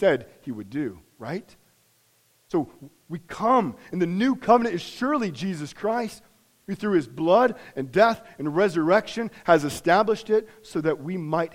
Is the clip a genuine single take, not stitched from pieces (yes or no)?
yes